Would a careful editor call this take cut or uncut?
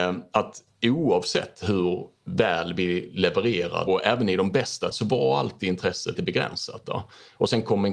cut